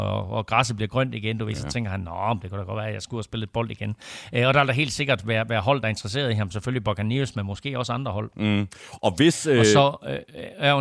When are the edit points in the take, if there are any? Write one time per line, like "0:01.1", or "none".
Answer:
none